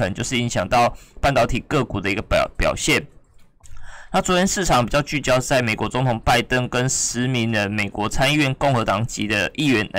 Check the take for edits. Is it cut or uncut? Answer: uncut